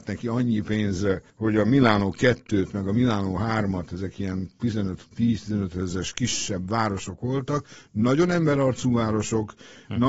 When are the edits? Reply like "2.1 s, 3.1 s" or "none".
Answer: 1.3 s, 5.1 s

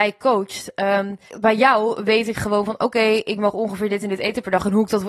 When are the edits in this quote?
1.3 s

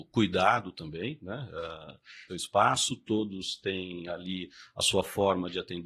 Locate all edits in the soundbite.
2.3 s

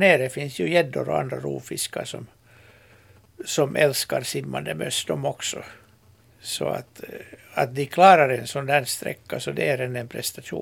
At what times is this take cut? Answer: 6.2 s

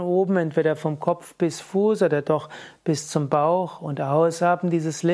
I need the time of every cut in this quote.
none

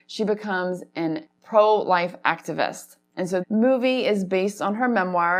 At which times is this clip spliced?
3.4 s

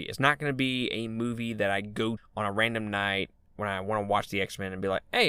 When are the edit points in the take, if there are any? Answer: 2.2 s

